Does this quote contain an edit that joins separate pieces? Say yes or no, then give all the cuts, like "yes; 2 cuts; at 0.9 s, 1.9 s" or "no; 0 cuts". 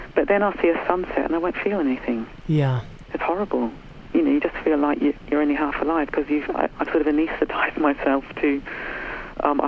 no; 0 cuts